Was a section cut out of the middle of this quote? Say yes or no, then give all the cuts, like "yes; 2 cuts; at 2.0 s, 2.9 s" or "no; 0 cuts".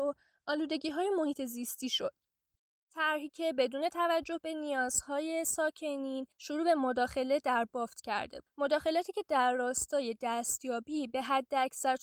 no; 0 cuts